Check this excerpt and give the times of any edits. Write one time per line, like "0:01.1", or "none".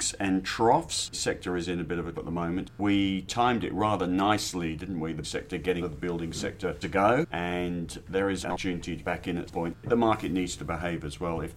0:01.1
0:02.1
0:05.2
0:05.8
0:06.8
0:08.4
0:09.0
0:09.5